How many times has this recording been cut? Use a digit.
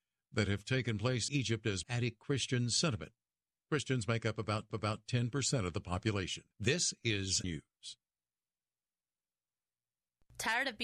5